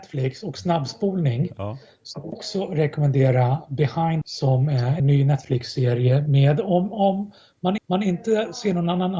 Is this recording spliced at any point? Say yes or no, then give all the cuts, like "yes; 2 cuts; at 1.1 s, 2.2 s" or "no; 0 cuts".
yes; 4 cuts; at 2.3 s, 4.2 s, 5.0 s, 7.8 s